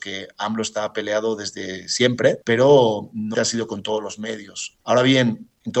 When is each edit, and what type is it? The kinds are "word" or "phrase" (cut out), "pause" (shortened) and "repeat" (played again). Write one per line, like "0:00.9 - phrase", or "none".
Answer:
0:03.3 - word